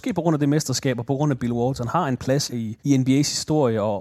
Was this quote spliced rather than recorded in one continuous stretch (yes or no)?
yes